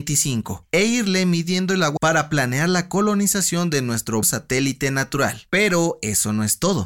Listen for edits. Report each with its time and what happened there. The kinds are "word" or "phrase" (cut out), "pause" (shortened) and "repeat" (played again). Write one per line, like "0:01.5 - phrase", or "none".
0:02.0 - phrase
0:04.2 - word